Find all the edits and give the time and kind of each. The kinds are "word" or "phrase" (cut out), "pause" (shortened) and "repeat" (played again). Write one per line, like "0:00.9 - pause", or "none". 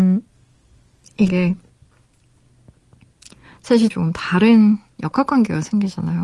0:01.3 - word
0:03.9 - phrase